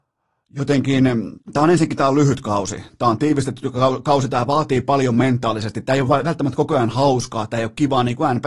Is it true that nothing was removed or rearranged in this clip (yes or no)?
no